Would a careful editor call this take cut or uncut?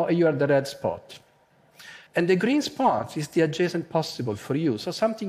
cut